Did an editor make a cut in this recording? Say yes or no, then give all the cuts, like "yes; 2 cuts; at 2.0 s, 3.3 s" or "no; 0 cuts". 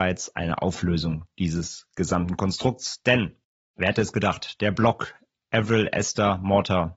no; 0 cuts